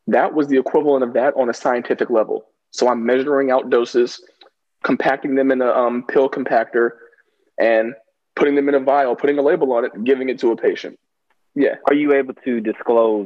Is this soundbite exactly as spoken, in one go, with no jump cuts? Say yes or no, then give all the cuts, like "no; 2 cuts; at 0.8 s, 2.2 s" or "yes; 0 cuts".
yes; 0 cuts